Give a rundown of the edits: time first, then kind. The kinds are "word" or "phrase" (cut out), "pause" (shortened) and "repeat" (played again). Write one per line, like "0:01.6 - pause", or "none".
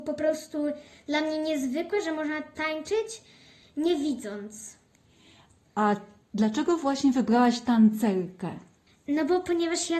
none